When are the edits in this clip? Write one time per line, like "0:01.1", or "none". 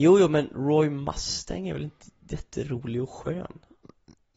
none